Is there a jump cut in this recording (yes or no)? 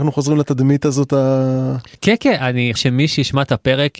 yes